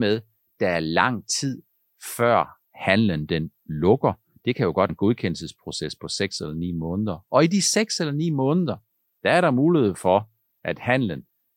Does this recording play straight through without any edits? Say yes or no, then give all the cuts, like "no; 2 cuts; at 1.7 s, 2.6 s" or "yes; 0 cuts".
no; 1 cut; at 4.9 s